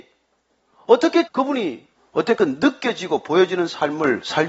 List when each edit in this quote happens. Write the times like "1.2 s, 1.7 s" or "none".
1.3 s, 2.0 s

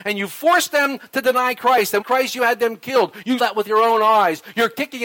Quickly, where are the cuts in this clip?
2.0 s, 3.4 s

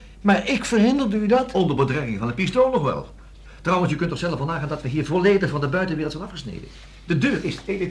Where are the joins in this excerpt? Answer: none

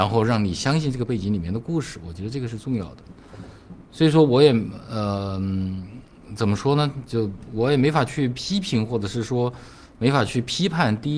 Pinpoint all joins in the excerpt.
none

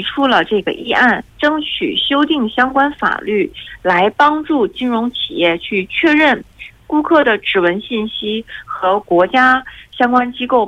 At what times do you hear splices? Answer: 1.3 s

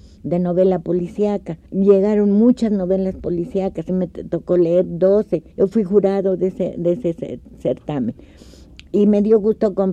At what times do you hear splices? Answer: 1.7 s, 3.9 s, 5.5 s

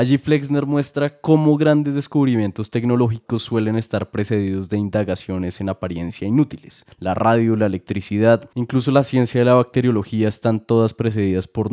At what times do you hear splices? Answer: 6.9 s

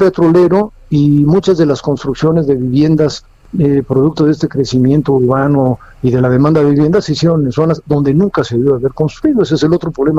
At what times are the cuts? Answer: none

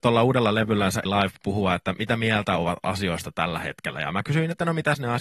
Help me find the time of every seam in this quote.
1.0 s

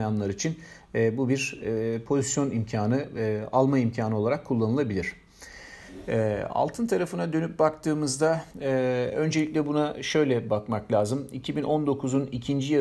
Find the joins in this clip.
8.5 s

